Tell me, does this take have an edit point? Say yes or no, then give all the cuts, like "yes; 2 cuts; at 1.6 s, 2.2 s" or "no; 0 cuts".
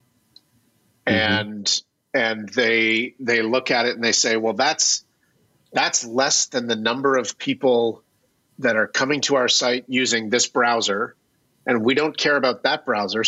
no; 0 cuts